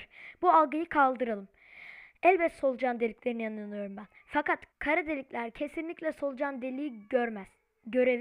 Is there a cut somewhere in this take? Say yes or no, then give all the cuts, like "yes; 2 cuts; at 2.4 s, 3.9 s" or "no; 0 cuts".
yes; 1 cut; at 4.7 s